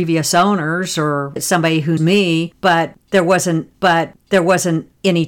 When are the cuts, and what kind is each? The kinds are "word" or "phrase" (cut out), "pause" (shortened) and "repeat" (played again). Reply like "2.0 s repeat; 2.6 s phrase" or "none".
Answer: 1.4 s word; 2.0 s word; 3.7 s repeat